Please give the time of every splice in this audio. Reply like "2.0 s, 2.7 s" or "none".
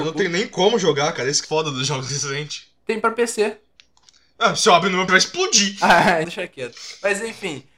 1.4 s, 5.1 s, 6.2 s